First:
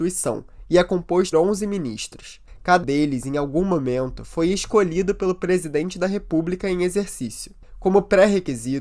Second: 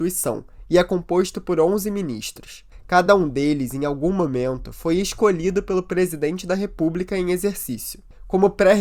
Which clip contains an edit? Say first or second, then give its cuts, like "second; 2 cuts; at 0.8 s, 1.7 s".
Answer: first; 2 cuts; at 1.3 s, 2.8 s